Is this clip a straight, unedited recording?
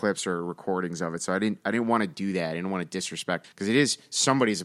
no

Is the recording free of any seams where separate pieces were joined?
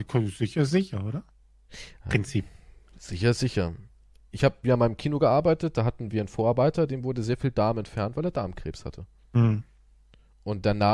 yes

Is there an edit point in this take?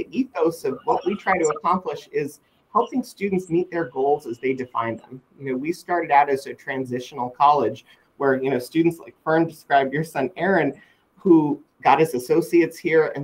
no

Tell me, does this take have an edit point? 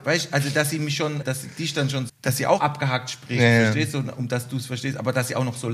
yes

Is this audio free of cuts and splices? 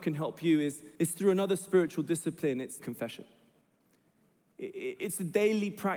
no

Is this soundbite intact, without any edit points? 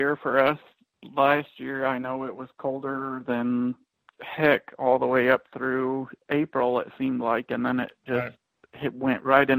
yes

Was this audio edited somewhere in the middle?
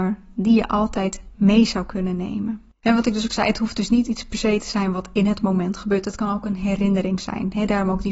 yes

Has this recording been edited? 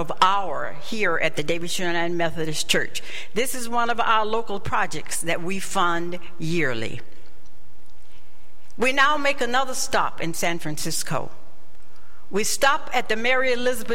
no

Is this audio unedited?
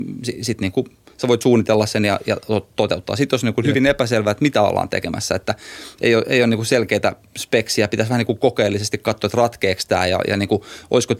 yes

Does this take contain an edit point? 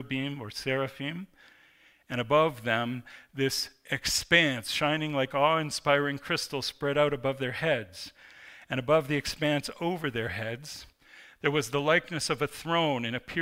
no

